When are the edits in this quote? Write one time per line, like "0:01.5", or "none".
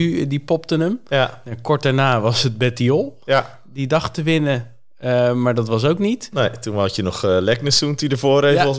none